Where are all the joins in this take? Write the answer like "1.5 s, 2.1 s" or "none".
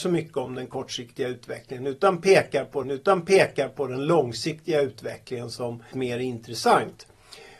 2.8 s, 5.9 s